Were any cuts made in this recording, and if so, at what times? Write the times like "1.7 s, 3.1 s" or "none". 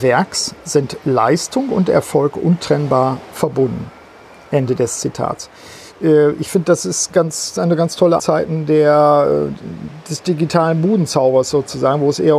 8.2 s